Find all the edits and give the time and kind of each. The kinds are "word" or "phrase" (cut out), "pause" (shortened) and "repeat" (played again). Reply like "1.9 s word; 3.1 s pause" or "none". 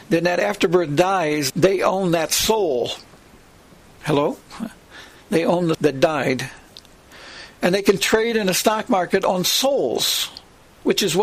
1.5 s word; 5.7 s word